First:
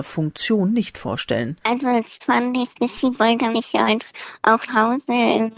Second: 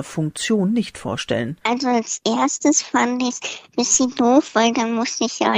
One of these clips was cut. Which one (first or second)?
first